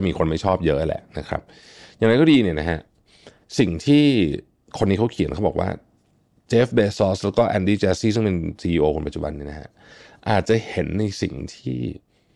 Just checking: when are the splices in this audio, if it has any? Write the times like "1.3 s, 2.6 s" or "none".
none